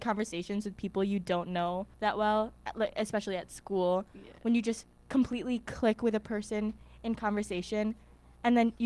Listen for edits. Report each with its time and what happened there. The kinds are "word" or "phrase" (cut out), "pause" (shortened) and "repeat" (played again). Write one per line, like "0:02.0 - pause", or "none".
0:01.9 - pause

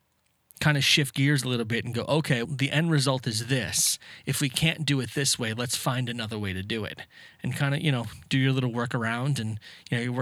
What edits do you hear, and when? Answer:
0:02.4 - word

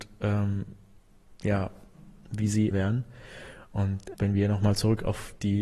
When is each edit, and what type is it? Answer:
0:02.7 - word
0:04.1 - word

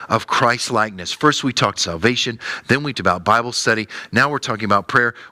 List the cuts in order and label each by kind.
0:01.7 - word
0:02.9 - word

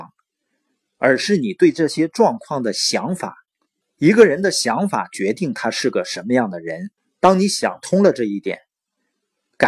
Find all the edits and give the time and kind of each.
0:03.8 - pause
0:07.0 - pause

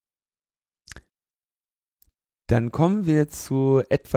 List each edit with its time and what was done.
none

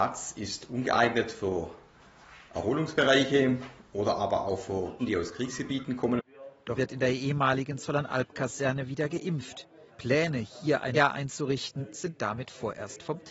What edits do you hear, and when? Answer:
0:05.0 - word
0:06.8 - word
0:09.9 - pause
0:10.9 - word

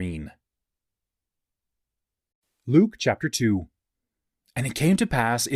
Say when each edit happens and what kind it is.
none

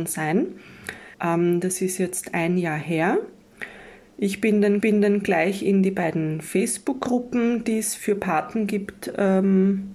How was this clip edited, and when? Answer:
0:01.1 - pause
0:04.8 - repeat

